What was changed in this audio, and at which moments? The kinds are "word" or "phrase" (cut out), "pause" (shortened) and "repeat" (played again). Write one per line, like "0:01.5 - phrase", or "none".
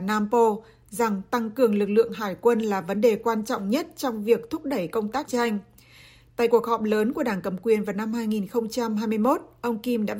0:05.3 - phrase